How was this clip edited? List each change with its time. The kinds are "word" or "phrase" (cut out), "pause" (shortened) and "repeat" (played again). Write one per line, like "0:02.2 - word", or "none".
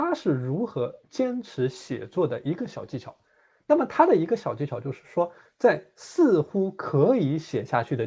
none